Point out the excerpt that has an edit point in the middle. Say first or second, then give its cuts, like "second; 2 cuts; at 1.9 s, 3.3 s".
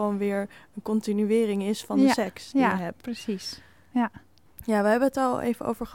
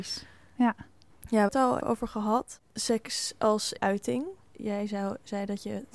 second; 3 cuts; at 1.5 s, 1.8 s, 3.8 s